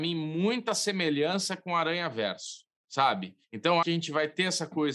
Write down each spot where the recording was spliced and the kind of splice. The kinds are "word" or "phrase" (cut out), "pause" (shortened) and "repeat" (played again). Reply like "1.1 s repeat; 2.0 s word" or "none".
3.4 s pause; 3.8 s word